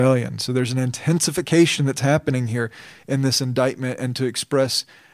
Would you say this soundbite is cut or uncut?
uncut